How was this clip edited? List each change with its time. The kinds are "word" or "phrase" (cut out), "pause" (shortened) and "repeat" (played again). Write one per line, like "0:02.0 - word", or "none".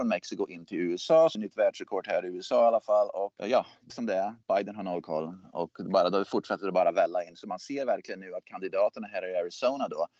0:01.3 - phrase
0:03.4 - word
0:03.9 - word